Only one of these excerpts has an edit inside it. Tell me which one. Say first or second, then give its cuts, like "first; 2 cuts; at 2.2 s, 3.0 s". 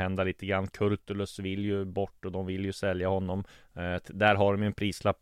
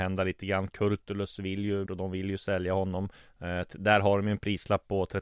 second; 1 cut; at 1.9 s